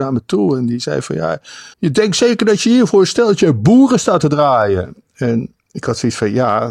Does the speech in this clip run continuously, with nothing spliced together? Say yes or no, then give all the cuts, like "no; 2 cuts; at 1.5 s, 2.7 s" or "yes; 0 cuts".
no; 2 cuts; at 1.7 s, 5.6 s